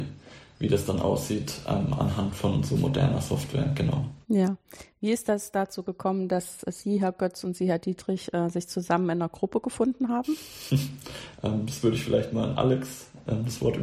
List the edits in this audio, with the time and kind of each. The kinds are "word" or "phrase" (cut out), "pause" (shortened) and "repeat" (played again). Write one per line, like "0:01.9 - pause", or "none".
0:04.2 - pause